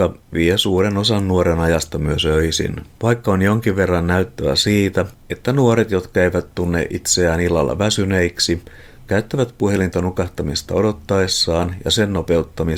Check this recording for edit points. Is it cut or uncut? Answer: cut